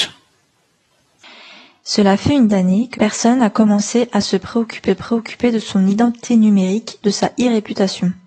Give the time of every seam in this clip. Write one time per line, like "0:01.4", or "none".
0:02.5
0:02.9
0:04.9
0:07.0